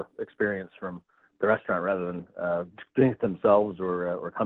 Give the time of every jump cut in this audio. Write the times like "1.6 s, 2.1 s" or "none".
none